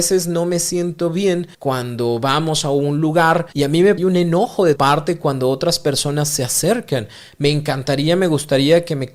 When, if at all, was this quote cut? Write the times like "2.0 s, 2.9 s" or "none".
1.5 s, 4.0 s, 4.8 s